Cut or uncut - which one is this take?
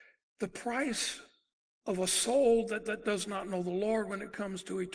cut